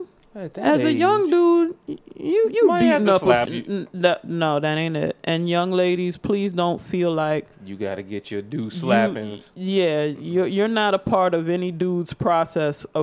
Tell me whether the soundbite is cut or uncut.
cut